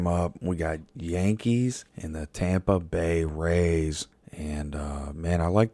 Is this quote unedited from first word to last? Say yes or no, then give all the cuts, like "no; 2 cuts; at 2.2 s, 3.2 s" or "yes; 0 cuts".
no; 2 cuts; at 1.9 s, 4.1 s